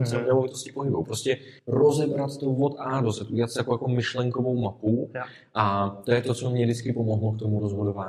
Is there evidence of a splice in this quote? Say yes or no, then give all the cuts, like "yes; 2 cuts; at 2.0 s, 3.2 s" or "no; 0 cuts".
yes; 1 cut; at 1.6 s